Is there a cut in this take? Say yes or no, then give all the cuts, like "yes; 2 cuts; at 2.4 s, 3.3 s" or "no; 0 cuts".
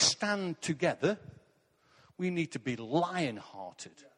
no; 0 cuts